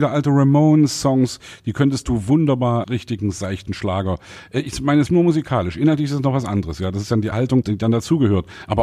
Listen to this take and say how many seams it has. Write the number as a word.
three